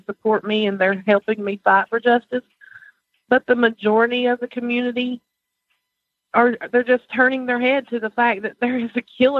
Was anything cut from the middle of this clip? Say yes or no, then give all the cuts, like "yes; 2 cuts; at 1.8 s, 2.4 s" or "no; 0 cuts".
no; 0 cuts